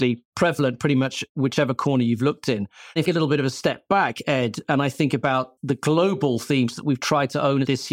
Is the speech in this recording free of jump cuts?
no; 2 cuts; at 3.1 s, 5.6 s

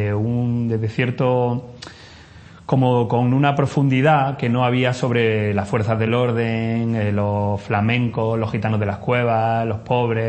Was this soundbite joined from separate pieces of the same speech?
no; 0 cuts

